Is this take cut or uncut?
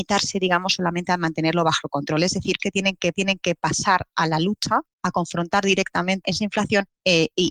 cut